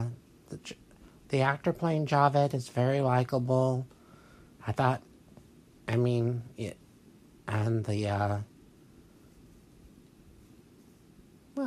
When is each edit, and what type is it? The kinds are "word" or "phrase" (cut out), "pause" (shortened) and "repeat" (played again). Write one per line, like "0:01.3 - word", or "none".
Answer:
none

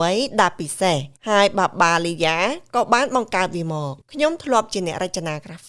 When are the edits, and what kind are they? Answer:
0:01.2 - pause
0:04.0 - pause

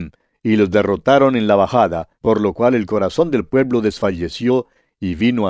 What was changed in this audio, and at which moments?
0:02.1 - pause

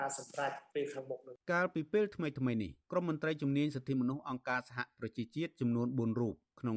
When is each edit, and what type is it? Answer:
0:01.4 - pause
0:02.8 - pause

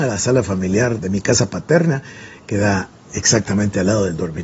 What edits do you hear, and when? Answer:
none

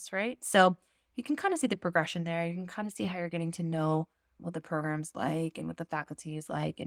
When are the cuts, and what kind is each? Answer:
none

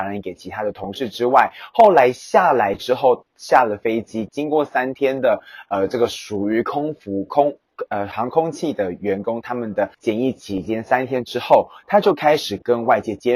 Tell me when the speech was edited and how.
0:09.9 - pause

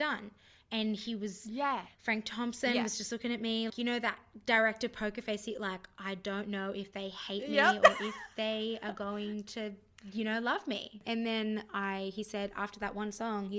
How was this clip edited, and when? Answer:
0:03.7 - word

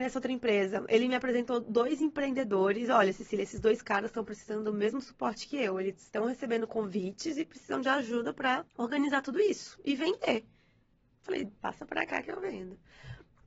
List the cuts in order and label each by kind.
0:08.7 - pause

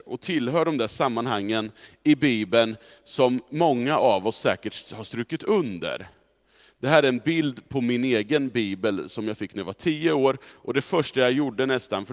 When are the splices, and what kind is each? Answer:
none

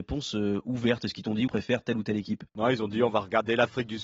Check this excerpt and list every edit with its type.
0:01.5 - phrase
0:02.5 - pause

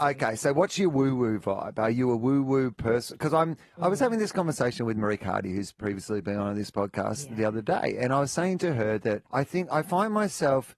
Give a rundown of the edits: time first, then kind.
0:09.3 - pause

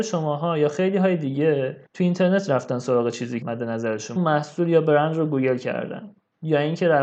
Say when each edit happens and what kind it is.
0:01.9 - pause
0:03.4 - word
0:04.2 - phrase

